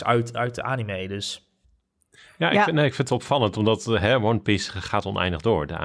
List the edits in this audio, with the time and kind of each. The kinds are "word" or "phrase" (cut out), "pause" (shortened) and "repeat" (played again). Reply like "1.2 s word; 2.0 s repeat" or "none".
none